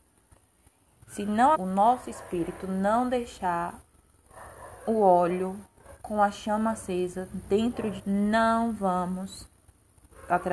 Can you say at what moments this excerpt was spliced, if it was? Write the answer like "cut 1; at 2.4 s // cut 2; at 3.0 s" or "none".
cut 1; at 1.5 s // cut 2; at 6.0 s // cut 3; at 8.0 s